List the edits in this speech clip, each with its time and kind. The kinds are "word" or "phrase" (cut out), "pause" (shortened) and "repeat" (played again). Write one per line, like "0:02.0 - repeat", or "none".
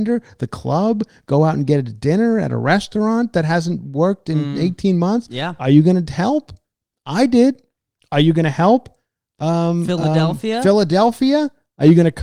none